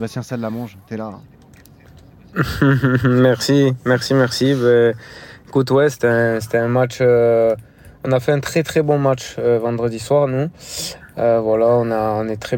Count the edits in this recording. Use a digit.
0